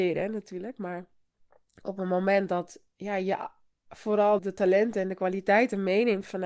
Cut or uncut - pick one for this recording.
cut